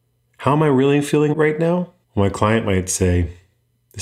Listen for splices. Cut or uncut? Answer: cut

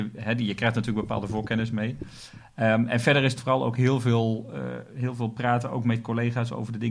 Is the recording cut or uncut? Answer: uncut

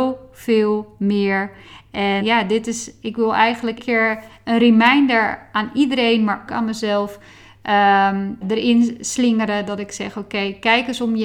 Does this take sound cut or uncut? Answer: cut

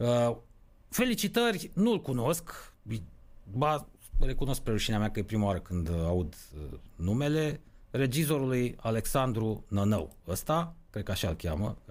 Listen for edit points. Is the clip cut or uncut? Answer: uncut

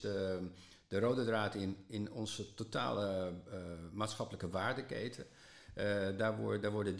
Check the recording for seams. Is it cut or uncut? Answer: uncut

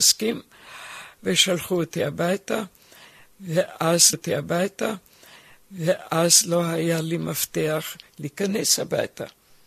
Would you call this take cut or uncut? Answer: cut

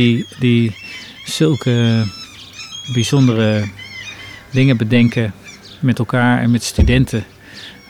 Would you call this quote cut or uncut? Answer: uncut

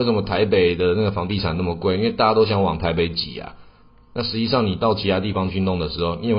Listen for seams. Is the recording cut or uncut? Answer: uncut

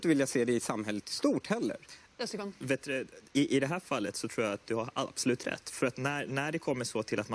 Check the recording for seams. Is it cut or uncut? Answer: uncut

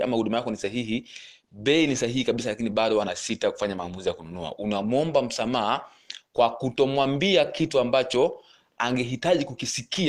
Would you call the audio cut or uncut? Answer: uncut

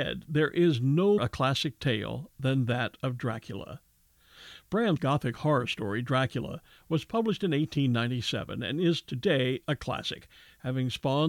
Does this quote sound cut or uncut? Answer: cut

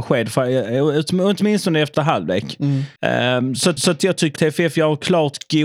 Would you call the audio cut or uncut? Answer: cut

